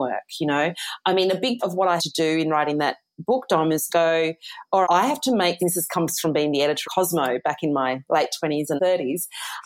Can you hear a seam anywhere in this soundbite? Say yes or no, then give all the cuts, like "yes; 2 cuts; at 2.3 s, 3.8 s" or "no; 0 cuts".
yes; 7 cuts; at 1.6 s, 2.0 s, 3.9 s, 4.8 s, 5.6 s, 6.8 s, 8.8 s